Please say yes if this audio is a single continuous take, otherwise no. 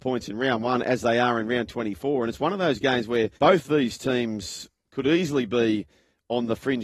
no